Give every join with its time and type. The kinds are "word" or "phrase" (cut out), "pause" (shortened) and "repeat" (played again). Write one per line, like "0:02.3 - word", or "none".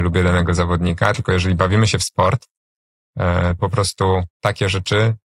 0:03.6 - word
0:04.3 - pause